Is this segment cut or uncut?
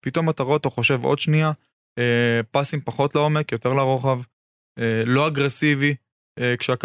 uncut